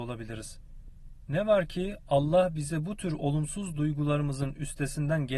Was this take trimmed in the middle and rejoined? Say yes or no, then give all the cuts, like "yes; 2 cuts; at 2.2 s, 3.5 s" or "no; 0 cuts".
no; 0 cuts